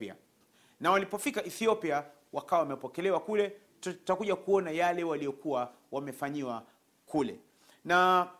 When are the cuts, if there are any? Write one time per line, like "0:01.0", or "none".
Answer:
none

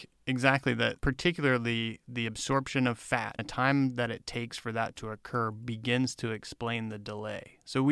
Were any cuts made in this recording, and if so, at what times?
0:01.0
0:03.4

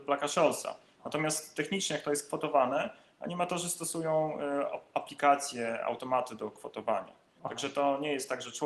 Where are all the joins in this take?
none

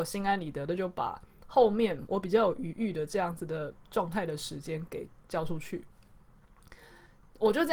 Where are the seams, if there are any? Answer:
0:05.2

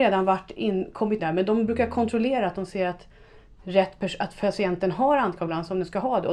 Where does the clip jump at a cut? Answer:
0:01.2

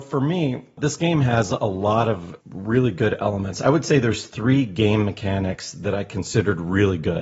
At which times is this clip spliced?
0:02.4

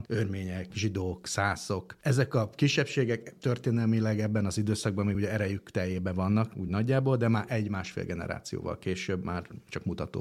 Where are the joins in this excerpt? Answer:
none

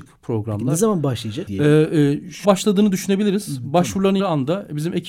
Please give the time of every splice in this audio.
0:01.5
0:02.4
0:04.2

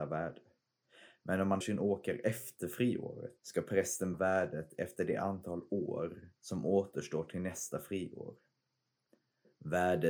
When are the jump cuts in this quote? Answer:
0:01.6
0:03.4
0:04.1
0:06.4

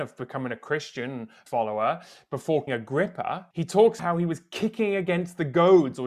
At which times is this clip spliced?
0:01.5
0:02.7
0:03.5
0:04.0

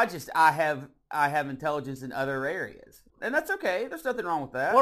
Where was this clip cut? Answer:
0:03.1

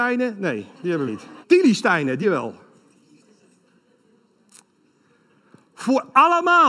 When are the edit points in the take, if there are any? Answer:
0:01.1
0:01.4
0:02.2

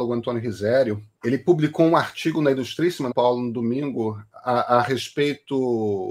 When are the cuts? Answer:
0:01.1
0:03.1

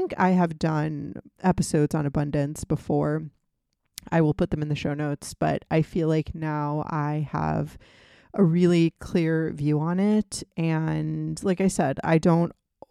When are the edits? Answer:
none

